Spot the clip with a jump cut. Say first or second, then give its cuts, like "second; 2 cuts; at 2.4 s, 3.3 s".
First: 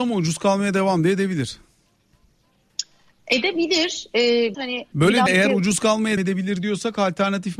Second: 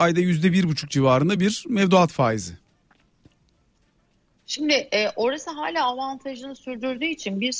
first; 4 cuts; at 4.5 s, 4.9 s, 5.3 s, 6.2 s